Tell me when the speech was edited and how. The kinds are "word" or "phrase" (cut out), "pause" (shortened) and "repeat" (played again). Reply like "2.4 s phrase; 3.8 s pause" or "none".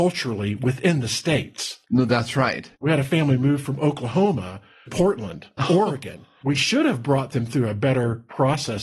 1.8 s pause; 2.7 s pause; 4.9 s word